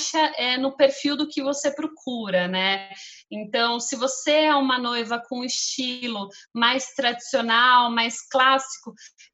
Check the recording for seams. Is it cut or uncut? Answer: uncut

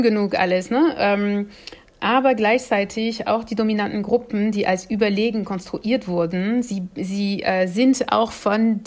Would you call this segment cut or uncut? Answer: uncut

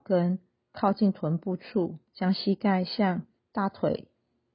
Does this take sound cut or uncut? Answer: cut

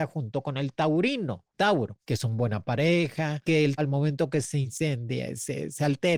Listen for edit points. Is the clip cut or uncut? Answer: cut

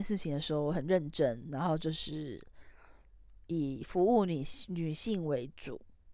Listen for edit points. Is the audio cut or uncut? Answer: cut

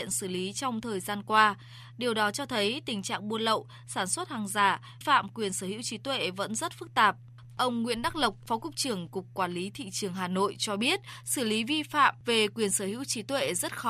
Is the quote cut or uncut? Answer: cut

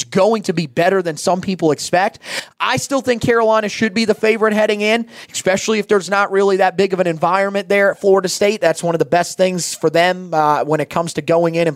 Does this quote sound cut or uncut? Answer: uncut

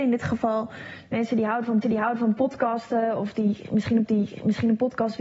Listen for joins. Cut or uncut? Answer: cut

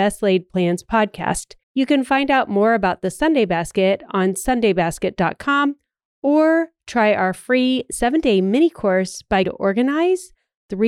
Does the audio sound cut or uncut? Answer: cut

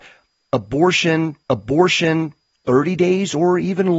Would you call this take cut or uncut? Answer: cut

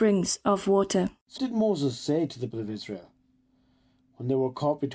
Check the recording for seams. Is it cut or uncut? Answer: cut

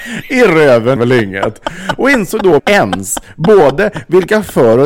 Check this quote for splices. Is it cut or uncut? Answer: cut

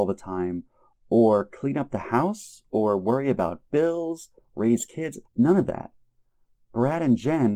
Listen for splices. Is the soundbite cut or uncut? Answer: cut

